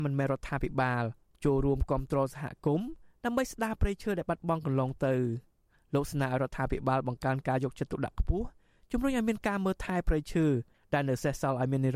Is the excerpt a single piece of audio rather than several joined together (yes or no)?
yes